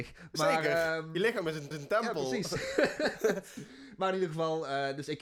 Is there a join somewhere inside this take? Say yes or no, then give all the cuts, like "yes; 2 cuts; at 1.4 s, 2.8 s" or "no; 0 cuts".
yes; 1 cut; at 1.7 s